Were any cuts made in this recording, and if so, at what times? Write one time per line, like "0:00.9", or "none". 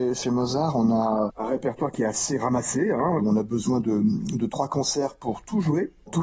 0:03.2